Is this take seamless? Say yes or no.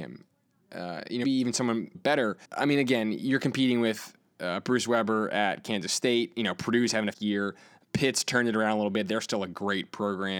no